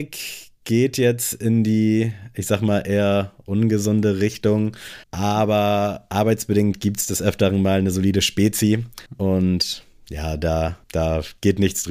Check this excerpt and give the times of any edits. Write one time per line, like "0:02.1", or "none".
0:05.0
0:09.1
0:10.8